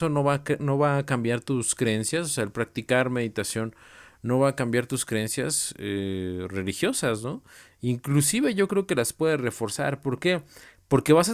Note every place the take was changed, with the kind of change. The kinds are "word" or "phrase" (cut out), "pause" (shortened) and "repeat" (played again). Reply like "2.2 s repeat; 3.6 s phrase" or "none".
none